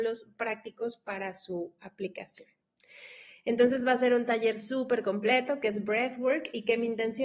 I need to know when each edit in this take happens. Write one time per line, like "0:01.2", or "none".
none